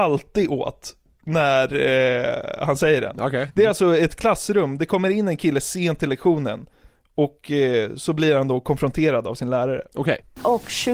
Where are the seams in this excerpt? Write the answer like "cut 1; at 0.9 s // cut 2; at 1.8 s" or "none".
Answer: none